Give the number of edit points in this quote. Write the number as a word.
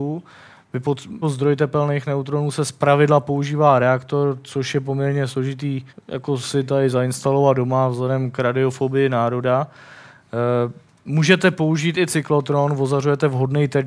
three